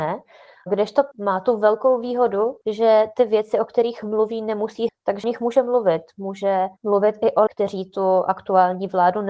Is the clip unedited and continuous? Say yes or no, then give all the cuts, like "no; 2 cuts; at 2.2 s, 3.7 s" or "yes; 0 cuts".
no; 6 cuts; at 1.1 s, 2.6 s, 4.9 s, 5.2 s, 6.8 s, 7.5 s